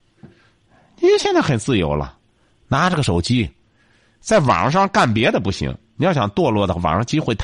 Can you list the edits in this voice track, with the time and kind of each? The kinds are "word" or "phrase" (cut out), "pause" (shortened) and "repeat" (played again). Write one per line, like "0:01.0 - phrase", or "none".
none